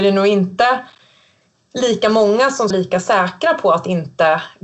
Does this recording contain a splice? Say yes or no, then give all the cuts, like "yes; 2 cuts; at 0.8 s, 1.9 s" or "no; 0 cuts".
yes; 1 cut; at 2.7 s